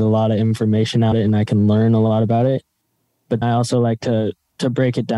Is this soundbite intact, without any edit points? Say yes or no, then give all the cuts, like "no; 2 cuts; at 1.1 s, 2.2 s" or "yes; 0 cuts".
no; 2 cuts; at 1.1 s, 3.4 s